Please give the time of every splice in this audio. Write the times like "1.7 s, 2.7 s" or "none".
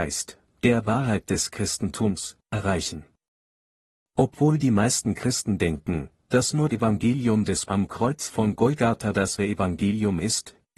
6.7 s, 7.7 s, 9.4 s